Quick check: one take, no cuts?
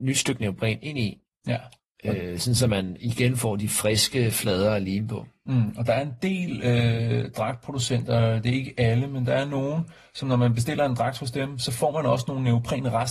yes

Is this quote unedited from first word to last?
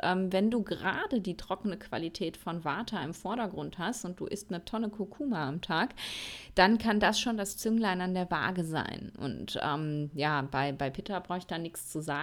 yes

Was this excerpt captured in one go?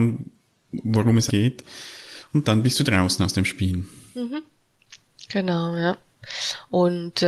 no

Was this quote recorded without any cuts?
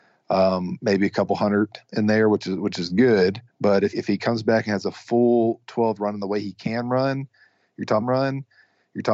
no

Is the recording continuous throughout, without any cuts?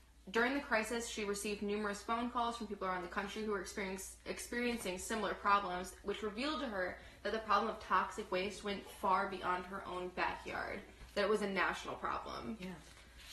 no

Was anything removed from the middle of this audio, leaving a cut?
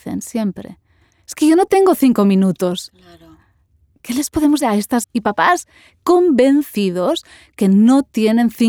yes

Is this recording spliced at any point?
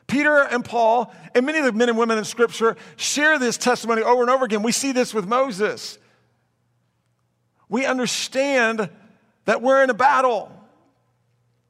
no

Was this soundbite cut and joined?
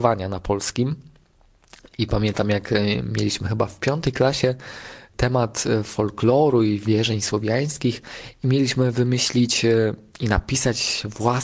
no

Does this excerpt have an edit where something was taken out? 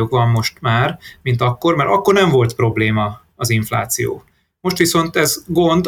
no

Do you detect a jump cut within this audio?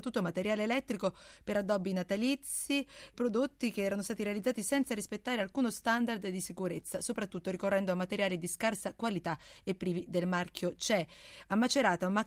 no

